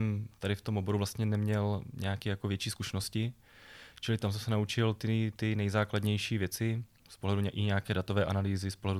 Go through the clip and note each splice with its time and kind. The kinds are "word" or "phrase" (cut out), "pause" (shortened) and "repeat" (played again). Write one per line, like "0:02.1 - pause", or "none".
none